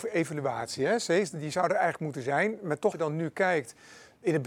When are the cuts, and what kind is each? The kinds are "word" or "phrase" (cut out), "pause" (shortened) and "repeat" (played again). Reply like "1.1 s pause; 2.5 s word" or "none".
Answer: 2.9 s word